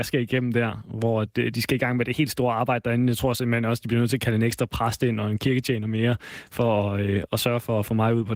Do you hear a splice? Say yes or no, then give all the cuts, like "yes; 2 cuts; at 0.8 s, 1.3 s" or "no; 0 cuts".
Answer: no; 0 cuts